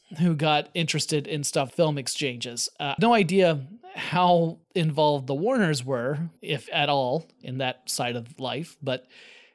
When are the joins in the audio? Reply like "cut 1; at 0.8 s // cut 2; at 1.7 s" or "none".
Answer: cut 1; at 1.7 s // cut 2; at 3.0 s // cut 3; at 4.6 s // cut 4; at 6.4 s